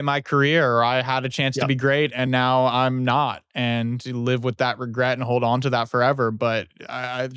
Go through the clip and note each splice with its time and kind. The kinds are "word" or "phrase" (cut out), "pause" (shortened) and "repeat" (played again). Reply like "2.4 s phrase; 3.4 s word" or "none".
none